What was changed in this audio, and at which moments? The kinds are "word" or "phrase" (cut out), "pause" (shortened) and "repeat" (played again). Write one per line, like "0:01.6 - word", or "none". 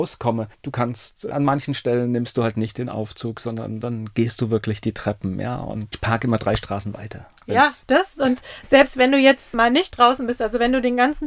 0:05.9 - word

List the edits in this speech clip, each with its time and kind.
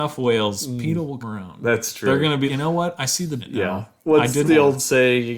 0:01.2 - word
0:02.5 - word
0:03.4 - phrase
0:04.5 - word

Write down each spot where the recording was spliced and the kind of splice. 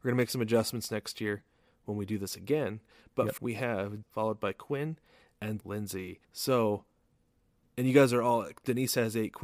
0:03.4 - word
0:04.0 - phrase
0:05.6 - word
0:06.2 - pause

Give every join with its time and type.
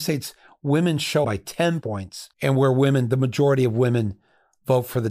0:01.2 - phrase
0:01.8 - word
0:02.3 - pause

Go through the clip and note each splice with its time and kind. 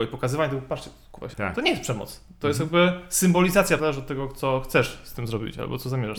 0:01.3 - word
0:03.8 - phrase

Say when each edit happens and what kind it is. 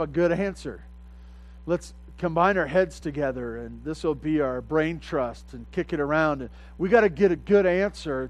none

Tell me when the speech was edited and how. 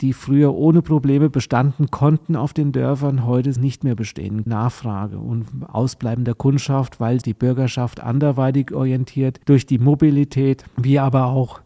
0:03.6 - word
0:04.5 - phrase
0:07.2 - phrase
0:09.4 - pause

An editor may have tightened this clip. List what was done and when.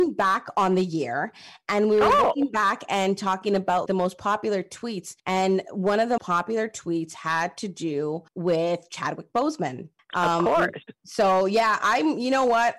0:03.9 - word
0:05.2 - pause
0:06.2 - word
0:08.3 - pause
0:10.0 - pause

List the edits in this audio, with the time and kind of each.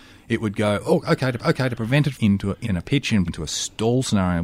0:01.4 - repeat
0:02.1 - phrase
0:02.6 - word
0:03.3 - phrase

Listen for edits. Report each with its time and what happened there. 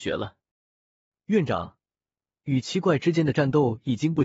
none

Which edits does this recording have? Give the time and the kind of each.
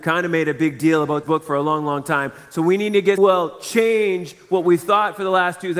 0:01.2 - word
0:03.2 - phrase

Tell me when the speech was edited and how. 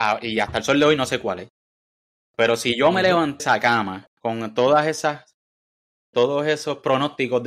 0:03.4 - word
0:06.1 - word

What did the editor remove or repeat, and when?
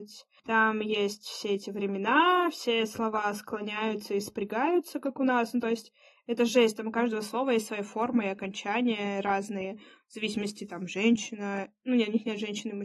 none

